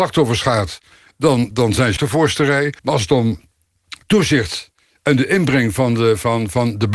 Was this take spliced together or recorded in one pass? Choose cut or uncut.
cut